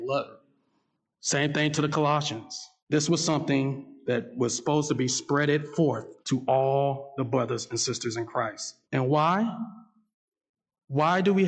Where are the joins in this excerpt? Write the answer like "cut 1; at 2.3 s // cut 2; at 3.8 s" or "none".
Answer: cut 1; at 2.8 s // cut 2; at 6.2 s // cut 3; at 8.8 s